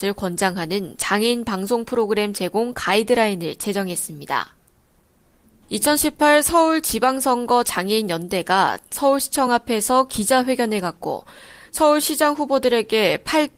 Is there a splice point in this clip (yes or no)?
no